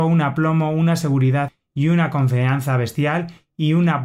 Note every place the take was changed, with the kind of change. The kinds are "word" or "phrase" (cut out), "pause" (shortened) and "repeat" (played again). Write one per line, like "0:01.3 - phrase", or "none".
none